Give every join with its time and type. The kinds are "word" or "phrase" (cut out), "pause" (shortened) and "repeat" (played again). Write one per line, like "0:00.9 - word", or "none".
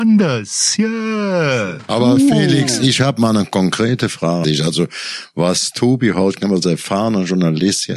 0:04.4 - word